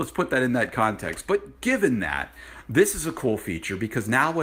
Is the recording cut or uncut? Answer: uncut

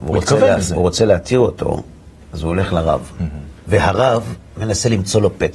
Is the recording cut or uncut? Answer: cut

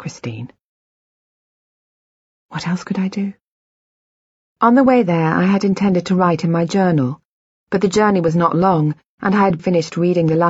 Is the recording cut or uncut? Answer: cut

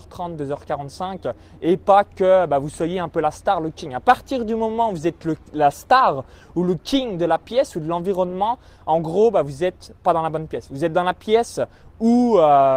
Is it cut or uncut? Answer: uncut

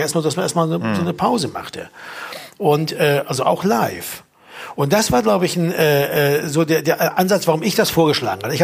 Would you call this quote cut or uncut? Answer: uncut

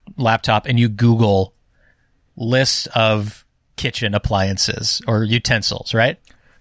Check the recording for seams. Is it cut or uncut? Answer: uncut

